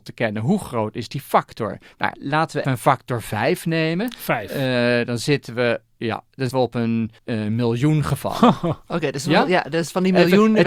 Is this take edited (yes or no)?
yes